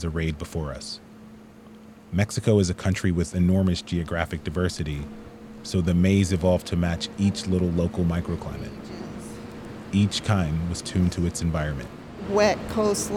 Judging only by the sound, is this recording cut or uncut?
uncut